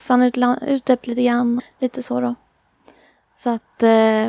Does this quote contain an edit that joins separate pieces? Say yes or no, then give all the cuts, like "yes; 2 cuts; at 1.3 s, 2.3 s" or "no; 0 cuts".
yes; 2 cuts; at 1.0 s, 1.6 s